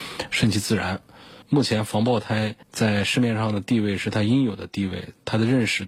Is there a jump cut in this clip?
yes; 2 cuts; at 1.4 s, 2.6 s

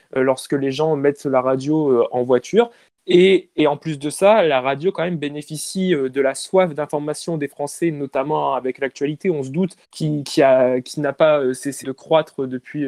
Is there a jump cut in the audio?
yes; 2 cuts; at 9.8 s, 11.8 s

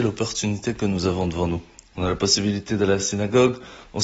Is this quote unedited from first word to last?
yes; 0 cuts

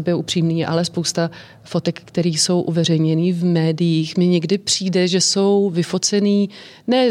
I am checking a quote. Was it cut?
no; 0 cuts

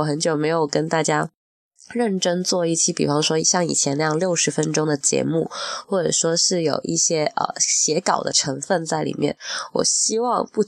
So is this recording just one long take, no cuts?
yes; 0 cuts

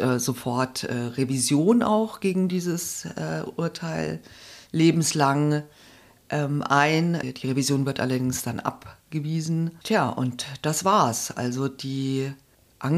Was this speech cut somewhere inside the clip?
no; 0 cuts

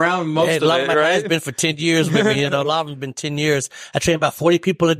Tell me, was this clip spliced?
no; 0 cuts

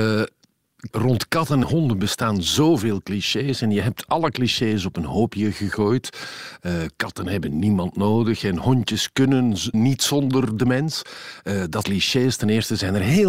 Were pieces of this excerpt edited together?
yes; 4 cuts; at 0.9 s, 1.6 s, 9.7 s, 11.8 s

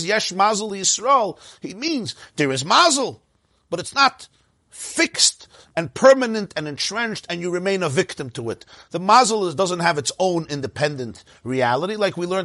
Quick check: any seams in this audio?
no; 0 cuts

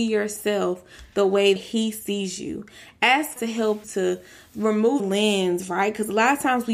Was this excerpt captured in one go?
no; 4 cuts; at 1.6 s, 3.4 s, 3.8 s, 5.0 s

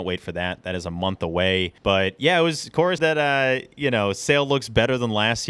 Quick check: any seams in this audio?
yes; 2 cuts; at 1.8 s, 3.0 s

